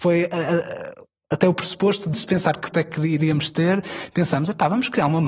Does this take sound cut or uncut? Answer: cut